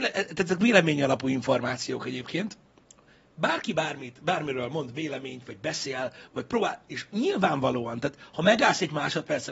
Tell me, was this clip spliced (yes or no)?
no